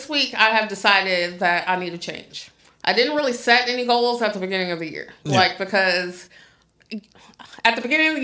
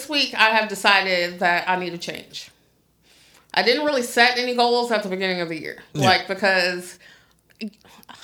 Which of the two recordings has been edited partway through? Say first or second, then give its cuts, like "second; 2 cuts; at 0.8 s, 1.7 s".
first; 1 cut; at 2.6 s